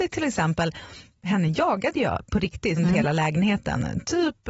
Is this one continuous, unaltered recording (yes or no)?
no